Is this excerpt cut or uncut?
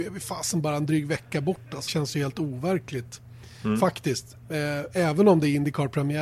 cut